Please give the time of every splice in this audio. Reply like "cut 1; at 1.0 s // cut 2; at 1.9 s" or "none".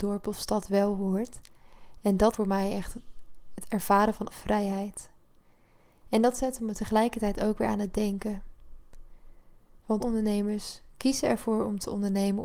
cut 1; at 2.3 s // cut 2; at 4.3 s // cut 3; at 10.0 s // cut 4; at 10.9 s